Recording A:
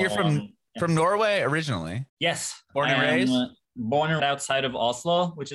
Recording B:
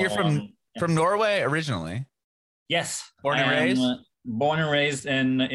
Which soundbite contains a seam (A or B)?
A